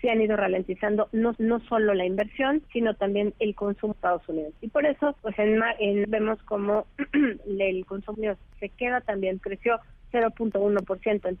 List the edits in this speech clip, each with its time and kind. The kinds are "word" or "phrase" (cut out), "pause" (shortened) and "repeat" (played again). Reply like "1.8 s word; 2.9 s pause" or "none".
1.3 s repeat; 2.7 s pause; 3.9 s word; 5.2 s pause; 6.0 s word; 8.1 s phrase; 9.4 s phrase